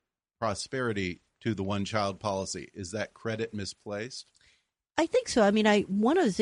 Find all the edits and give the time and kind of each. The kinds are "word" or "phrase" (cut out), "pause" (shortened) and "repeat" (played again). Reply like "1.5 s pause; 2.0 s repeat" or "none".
none